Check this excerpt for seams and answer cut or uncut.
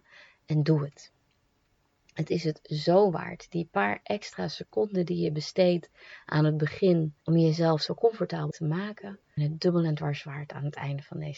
cut